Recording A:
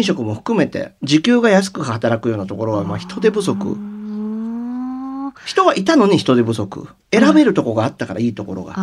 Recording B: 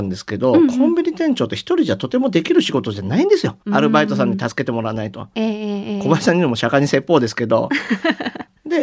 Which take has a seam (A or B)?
B